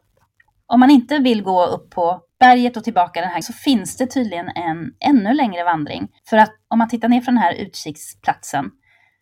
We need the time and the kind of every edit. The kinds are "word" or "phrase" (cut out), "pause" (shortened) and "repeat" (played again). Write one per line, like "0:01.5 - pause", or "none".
0:03.4 - word
0:06.2 - pause
0:06.7 - word